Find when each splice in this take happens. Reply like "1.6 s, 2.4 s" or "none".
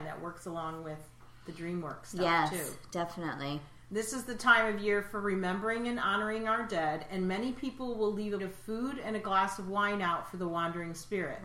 8.4 s